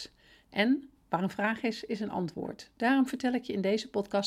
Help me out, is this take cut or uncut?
cut